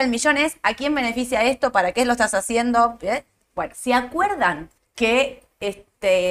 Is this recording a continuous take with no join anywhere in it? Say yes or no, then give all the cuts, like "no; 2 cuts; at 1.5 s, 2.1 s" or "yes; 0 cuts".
no; 2 cuts; at 3.7 s, 4.8 s